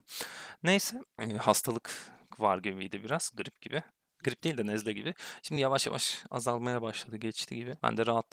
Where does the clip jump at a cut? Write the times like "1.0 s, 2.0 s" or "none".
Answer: none